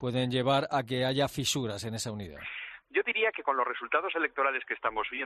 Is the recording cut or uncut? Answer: uncut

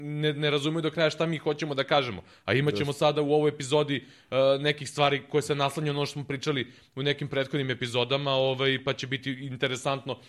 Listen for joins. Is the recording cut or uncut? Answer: uncut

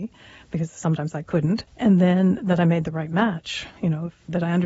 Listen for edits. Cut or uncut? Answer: cut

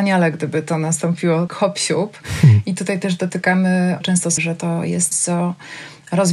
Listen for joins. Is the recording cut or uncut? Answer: cut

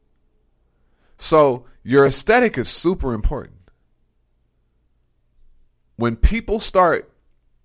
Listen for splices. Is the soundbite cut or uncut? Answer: uncut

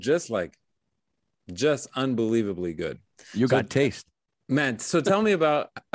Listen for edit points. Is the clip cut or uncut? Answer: uncut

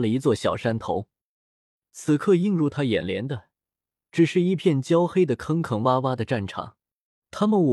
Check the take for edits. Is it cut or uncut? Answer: uncut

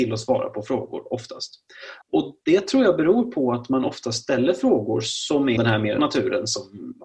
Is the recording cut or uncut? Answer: cut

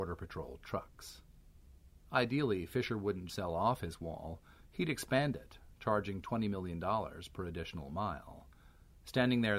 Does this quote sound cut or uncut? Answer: cut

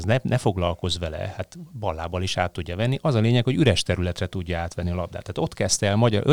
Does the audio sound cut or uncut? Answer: uncut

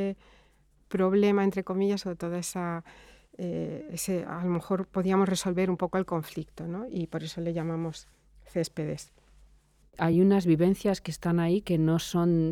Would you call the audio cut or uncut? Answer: uncut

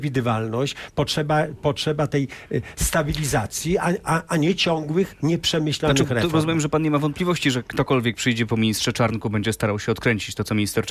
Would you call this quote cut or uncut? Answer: uncut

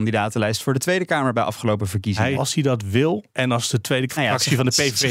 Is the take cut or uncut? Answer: cut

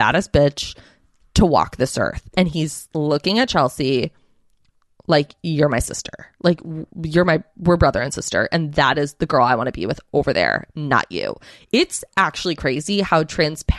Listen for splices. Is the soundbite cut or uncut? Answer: uncut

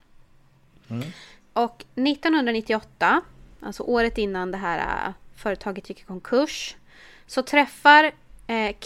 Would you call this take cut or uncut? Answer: uncut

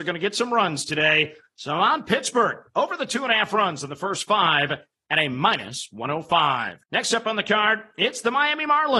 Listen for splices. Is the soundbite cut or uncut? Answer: cut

